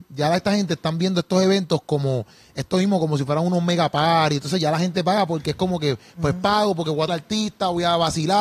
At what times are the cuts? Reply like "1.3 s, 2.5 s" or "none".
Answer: 7.1 s